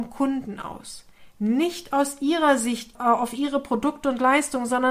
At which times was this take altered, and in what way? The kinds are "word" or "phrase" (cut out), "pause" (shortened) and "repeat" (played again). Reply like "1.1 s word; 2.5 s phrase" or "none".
none